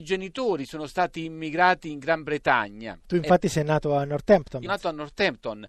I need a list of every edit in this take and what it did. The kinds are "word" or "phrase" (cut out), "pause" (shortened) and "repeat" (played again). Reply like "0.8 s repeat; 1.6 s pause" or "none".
4.7 s word